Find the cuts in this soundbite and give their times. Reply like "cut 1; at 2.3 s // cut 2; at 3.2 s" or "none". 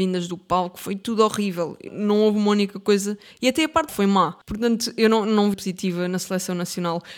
cut 1; at 1.9 s // cut 2; at 3.9 s // cut 3; at 4.4 s // cut 4; at 5.5 s